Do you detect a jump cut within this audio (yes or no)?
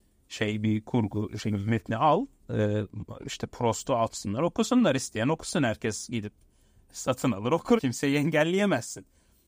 yes